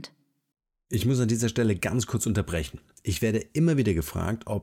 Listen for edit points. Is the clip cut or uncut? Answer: uncut